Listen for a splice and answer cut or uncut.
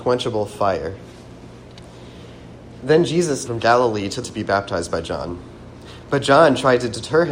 cut